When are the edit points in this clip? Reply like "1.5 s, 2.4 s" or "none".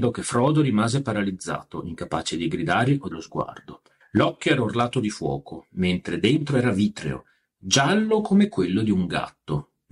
3.1 s, 4.0 s